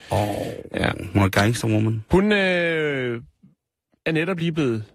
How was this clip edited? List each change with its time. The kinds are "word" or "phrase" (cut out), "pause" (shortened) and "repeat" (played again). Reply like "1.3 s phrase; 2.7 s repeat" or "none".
none